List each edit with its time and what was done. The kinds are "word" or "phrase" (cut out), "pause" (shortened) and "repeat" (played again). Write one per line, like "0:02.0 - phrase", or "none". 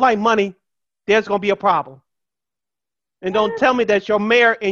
none